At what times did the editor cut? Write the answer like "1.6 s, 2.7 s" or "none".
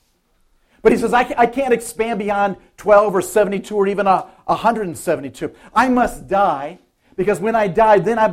none